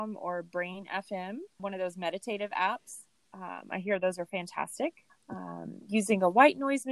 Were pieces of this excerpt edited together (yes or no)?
yes